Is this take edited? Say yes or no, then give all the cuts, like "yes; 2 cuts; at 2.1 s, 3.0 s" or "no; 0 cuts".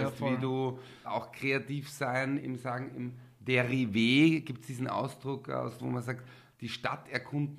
yes; 3 cuts; at 1.0 s, 2.4 s, 5.8 s